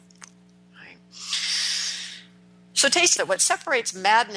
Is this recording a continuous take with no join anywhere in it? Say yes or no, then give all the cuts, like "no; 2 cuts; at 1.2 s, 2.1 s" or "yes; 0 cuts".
no; 1 cut; at 3.2 s